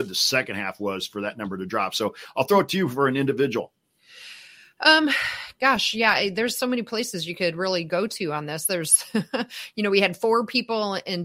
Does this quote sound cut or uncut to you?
uncut